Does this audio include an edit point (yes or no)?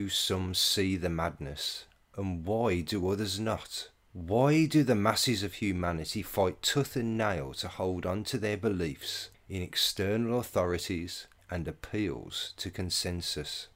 yes